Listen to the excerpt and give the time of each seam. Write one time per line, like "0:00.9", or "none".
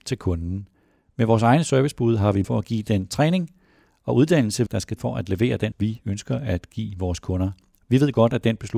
0:02.4
0:04.7
0:05.0
0:05.7